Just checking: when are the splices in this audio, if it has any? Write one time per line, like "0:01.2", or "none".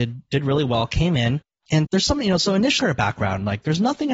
0:01.8
0:02.8